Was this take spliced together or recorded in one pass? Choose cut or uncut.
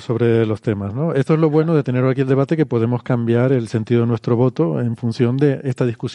uncut